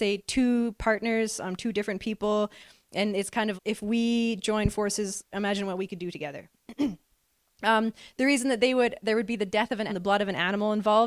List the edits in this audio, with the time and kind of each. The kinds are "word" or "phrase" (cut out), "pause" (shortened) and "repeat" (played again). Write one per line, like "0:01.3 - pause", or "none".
0:03.6 - word
0:09.9 - word